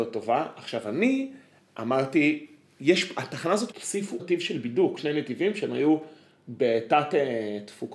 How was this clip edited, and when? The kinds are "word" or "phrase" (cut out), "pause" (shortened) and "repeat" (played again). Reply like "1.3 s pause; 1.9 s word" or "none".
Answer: 3.7 s phrase; 4.2 s word; 5.0 s word